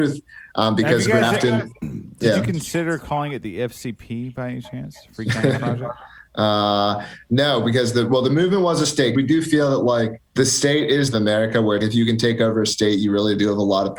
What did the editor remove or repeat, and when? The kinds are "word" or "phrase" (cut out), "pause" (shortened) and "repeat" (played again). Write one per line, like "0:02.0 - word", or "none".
0:09.1 - word
0:10.3 - pause
0:11.1 - phrase
0:11.8 - word